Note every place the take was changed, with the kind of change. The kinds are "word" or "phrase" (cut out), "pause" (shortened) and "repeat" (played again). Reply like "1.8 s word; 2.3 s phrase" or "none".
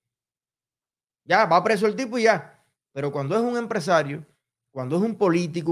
none